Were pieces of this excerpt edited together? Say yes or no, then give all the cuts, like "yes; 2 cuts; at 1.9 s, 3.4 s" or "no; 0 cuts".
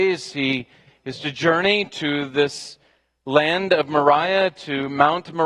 no; 0 cuts